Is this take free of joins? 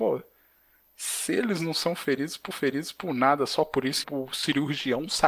no; 2 cuts; at 2.5 s, 4.0 s

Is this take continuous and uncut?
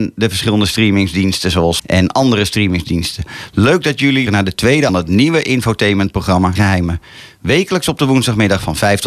no; 4 cuts; at 1.8 s, 4.3 s, 4.9 s, 6.6 s

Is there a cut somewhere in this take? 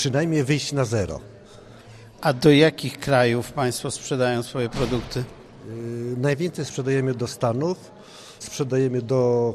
no; 0 cuts

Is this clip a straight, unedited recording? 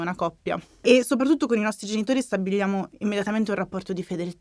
yes; 0 cuts

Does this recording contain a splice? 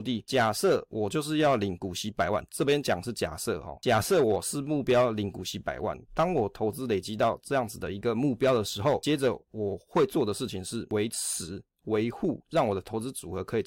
no; 0 cuts

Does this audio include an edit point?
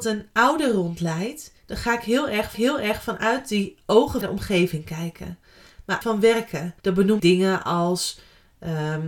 yes; 6 cuts; at 1.6 s, 2.5 s, 4.2 s, 6.0 s, 6.8 s, 7.2 s

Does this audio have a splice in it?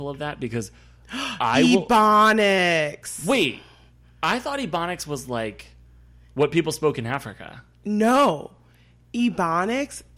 no; 0 cuts

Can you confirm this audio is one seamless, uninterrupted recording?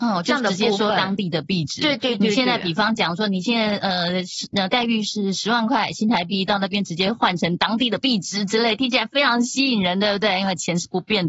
yes; 0 cuts

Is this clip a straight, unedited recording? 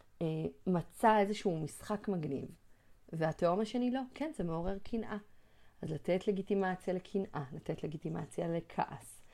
yes; 0 cuts

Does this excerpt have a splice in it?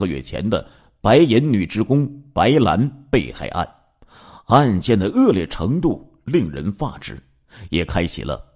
no; 0 cuts

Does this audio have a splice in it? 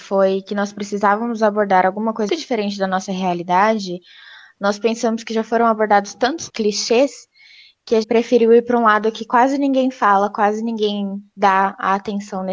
yes; 3 cuts; at 2.3 s, 6.5 s, 8.0 s

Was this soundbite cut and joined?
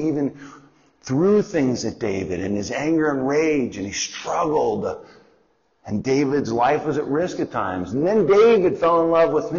no; 0 cuts

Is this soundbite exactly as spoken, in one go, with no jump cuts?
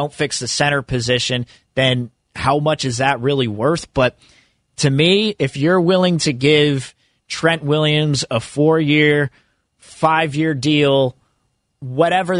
yes; 0 cuts

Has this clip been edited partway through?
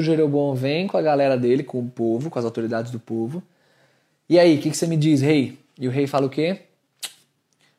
no; 0 cuts

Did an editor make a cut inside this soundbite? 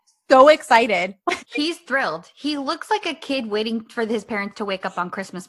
yes; 1 cut; at 1.4 s

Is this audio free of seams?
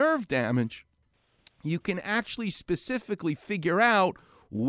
yes; 0 cuts

